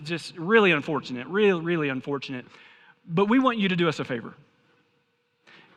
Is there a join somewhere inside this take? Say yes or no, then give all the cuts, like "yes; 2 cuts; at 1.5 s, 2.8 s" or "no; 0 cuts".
no; 0 cuts